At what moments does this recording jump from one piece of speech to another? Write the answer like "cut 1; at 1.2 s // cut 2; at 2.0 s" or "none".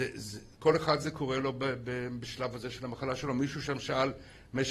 none